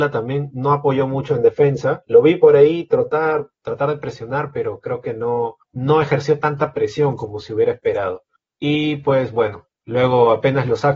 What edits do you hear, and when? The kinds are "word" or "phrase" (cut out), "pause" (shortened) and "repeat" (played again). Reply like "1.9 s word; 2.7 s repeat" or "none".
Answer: 3.6 s pause; 5.6 s pause; 8.4 s pause